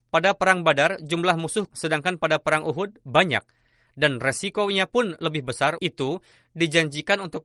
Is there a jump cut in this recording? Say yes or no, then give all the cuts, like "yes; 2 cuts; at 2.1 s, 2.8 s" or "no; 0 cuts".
yes; 2 cuts; at 1.7 s, 5.8 s